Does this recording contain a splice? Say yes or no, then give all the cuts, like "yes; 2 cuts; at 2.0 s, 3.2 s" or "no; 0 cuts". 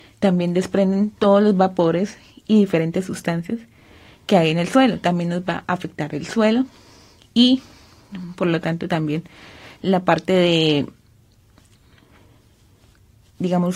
no; 0 cuts